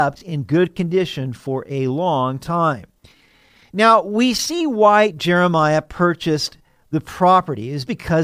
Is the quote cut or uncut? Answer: uncut